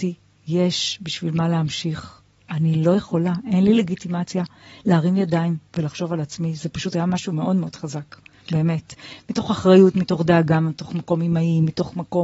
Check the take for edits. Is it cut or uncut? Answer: uncut